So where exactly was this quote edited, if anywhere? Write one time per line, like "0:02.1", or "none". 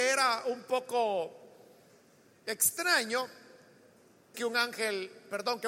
0:04.3